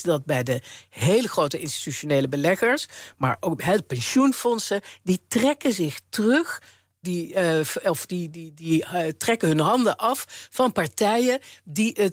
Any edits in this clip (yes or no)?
yes